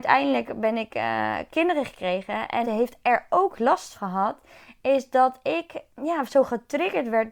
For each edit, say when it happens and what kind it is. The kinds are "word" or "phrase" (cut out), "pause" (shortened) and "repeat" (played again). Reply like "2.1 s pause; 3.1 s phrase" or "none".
1.5 s word; 2.6 s phrase; 3.9 s word; 5.9 s pause

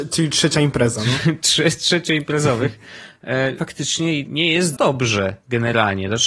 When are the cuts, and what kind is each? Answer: 3.6 s word; 4.2 s word; 4.7 s word

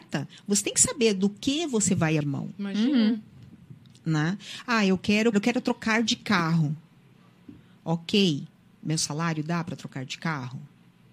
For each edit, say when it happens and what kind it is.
2.2 s word; 5.3 s word

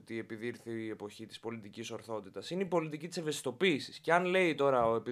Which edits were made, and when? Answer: none

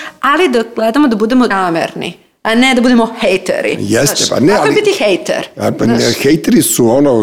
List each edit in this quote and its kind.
1.5 s word

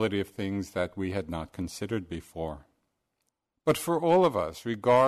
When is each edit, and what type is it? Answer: 3.3 s pause

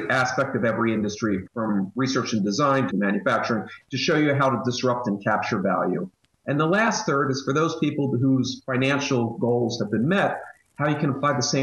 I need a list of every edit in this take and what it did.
1.5 s word; 2.9 s word

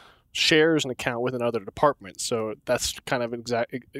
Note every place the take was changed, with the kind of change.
2.6 s pause

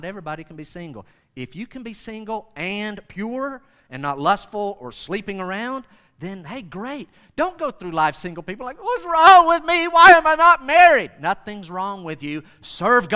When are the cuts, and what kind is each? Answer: none

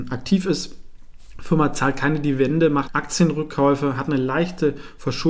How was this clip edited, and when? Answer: 2.9 s word

